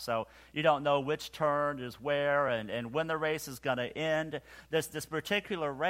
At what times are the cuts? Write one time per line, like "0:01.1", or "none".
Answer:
none